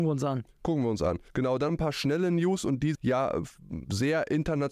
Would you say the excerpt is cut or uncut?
cut